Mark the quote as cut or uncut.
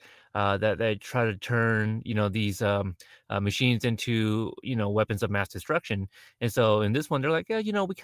uncut